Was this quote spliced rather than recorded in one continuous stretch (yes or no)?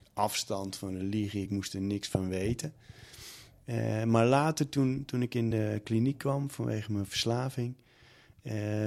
no